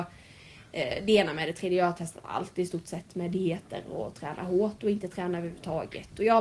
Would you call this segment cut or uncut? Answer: uncut